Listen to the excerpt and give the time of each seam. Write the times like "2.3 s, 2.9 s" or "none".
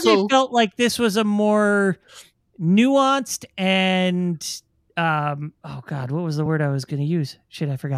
none